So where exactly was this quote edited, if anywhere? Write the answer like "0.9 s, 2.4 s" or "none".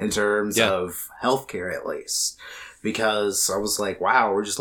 none